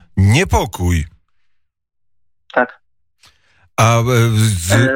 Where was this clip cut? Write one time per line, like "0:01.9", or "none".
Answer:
none